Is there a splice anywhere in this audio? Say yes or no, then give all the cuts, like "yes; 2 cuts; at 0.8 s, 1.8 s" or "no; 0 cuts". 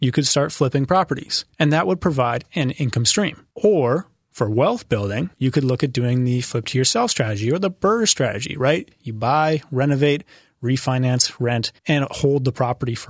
yes; 4 cuts; at 1.5 s, 3.5 s, 5.3 s, 11.8 s